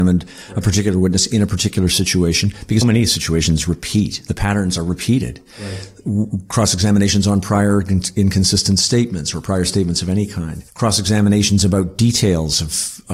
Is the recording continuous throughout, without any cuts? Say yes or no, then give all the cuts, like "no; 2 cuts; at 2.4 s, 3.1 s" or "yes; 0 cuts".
no; 2 cuts; at 2.8 s, 10.7 s